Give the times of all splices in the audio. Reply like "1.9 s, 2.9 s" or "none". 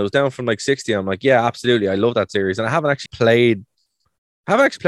3.1 s